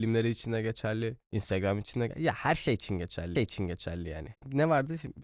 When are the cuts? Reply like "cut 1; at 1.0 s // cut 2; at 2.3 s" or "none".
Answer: cut 1; at 3.3 s